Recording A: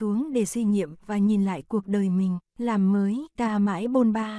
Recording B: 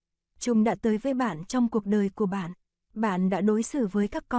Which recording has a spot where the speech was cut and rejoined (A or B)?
A